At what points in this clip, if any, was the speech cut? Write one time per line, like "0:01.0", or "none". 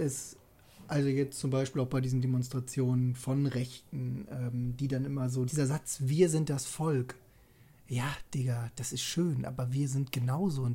0:05.5